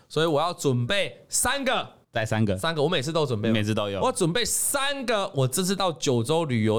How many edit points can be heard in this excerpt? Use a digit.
1